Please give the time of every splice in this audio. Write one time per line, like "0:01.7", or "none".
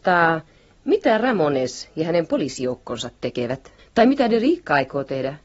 0:03.8